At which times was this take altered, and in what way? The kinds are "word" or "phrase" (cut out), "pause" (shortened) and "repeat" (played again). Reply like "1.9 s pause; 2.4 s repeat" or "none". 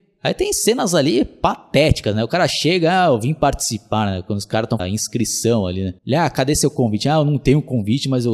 4.8 s phrase; 6.0 s pause